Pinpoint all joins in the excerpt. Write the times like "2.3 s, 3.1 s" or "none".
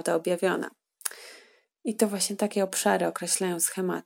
none